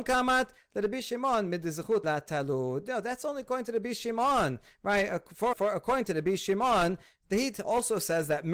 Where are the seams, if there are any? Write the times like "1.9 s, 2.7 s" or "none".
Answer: 2.0 s, 5.5 s